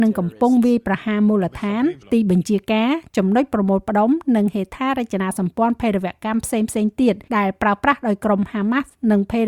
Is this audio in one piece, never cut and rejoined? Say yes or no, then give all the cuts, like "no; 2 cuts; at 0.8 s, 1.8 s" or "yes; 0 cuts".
no; 2 cuts; at 2.0 s, 7.3 s